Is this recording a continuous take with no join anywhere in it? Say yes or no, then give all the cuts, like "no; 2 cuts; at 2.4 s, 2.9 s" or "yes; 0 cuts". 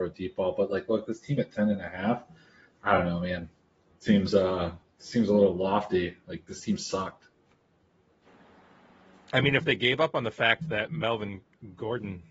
yes; 0 cuts